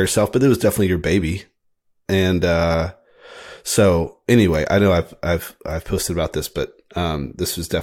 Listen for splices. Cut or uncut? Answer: uncut